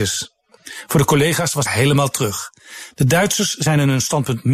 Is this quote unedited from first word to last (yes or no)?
no